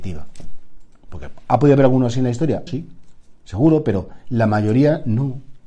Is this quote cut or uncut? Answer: cut